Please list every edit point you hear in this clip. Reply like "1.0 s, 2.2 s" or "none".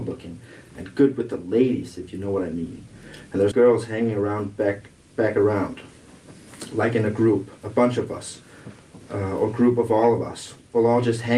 3.5 s, 7.6 s